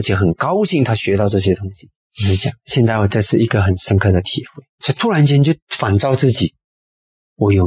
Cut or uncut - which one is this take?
cut